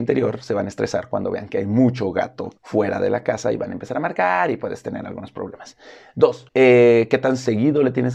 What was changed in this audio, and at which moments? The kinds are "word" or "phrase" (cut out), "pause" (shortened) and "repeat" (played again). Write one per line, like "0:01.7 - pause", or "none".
0:02.6 - pause
0:06.5 - pause